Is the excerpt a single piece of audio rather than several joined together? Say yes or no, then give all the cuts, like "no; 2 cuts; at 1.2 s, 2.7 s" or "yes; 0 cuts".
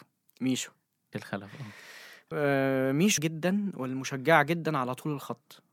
no; 3 cuts; at 1.1 s, 2.3 s, 3.2 s